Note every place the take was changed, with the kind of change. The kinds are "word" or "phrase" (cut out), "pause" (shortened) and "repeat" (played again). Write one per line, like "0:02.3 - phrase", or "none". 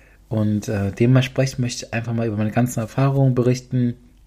none